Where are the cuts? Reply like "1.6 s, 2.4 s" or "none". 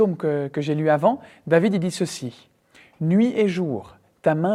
none